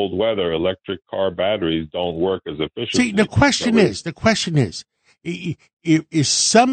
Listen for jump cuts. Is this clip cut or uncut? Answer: uncut